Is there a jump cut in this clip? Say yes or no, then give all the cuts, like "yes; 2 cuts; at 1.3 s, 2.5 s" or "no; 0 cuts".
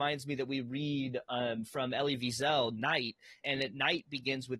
yes; 1 cut; at 3.4 s